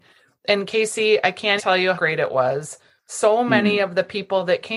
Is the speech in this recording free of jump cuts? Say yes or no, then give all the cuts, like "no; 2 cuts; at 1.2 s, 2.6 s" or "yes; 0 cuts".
no; 2 cuts; at 1.6 s, 1.9 s